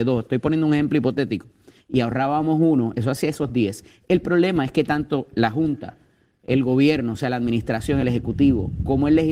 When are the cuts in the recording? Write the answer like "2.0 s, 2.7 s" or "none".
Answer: none